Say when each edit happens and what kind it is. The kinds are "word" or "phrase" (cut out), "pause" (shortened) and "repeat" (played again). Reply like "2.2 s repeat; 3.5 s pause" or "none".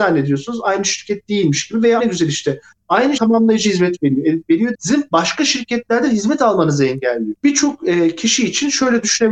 2.0 s word; 3.2 s phrase; 4.7 s word; 7.4 s pause